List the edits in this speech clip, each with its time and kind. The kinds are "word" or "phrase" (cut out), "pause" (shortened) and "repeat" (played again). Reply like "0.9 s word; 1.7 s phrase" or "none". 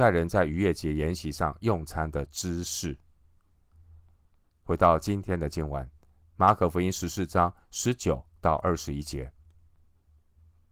6.2 s pause